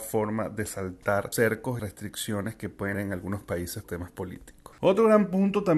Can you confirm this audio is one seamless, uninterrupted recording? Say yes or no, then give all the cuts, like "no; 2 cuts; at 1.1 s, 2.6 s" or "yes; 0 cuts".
no; 4 cuts; at 1.3 s, 1.8 s, 2.9 s, 3.8 s